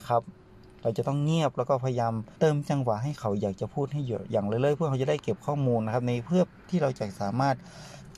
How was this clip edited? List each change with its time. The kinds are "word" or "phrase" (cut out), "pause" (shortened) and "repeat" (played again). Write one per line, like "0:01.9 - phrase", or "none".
0:02.3 - pause